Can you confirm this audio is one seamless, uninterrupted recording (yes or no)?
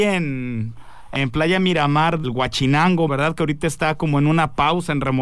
no